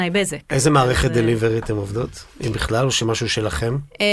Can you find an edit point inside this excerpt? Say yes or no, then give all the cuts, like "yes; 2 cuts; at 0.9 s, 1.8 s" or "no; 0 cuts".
no; 0 cuts